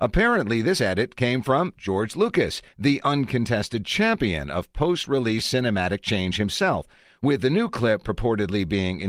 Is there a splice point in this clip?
no; 0 cuts

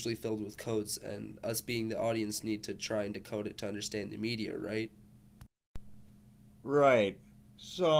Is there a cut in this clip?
no; 0 cuts

